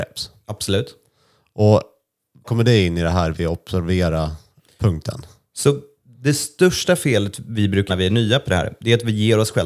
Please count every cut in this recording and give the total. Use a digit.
2